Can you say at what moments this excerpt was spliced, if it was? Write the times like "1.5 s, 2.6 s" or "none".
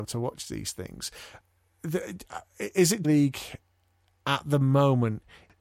3.0 s